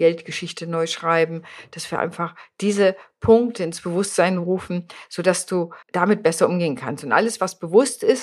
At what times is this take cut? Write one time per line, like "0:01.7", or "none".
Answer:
0:05.8